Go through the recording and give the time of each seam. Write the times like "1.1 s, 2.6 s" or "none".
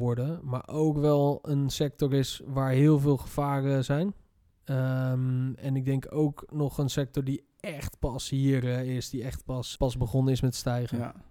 9.8 s